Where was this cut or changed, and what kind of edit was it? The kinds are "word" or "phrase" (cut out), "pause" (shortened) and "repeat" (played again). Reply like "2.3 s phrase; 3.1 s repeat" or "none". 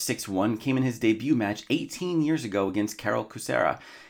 none